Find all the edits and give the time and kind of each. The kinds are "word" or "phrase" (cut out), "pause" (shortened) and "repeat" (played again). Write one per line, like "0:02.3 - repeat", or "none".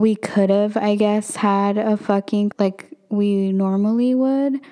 0:02.5 - phrase